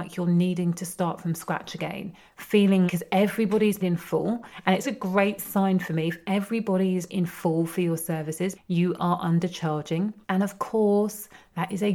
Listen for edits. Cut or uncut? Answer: cut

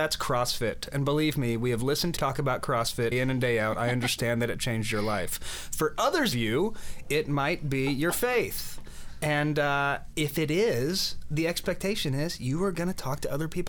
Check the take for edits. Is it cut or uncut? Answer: cut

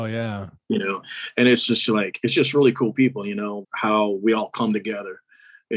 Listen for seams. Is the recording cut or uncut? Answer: cut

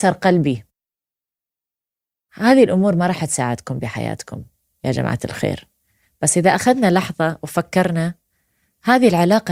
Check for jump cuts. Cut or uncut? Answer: uncut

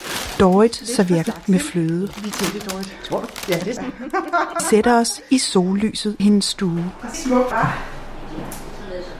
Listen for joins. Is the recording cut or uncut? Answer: cut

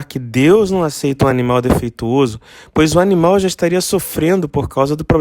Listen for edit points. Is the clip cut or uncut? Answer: uncut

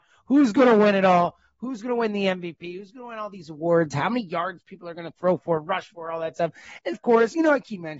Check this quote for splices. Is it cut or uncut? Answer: cut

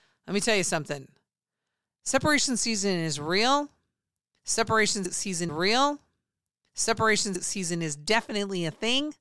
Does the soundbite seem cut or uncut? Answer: cut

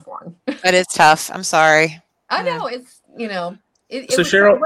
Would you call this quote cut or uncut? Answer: uncut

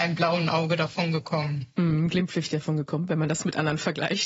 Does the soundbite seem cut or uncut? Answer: uncut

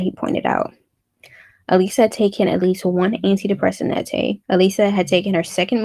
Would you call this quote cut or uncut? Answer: cut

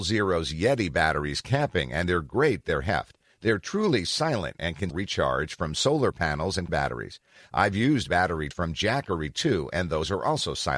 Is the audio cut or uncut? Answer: cut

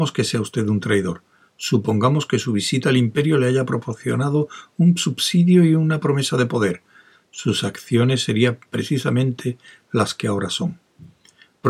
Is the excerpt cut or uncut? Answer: uncut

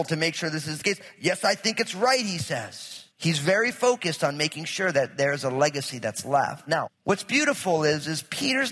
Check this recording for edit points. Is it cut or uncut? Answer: cut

